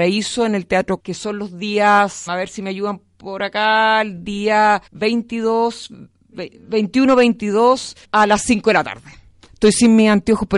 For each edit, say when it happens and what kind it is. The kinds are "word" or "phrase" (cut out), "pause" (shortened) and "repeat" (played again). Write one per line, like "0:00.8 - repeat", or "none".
0:01.0 - word
0:02.3 - word
0:04.9 - pause
0:08.0 - pause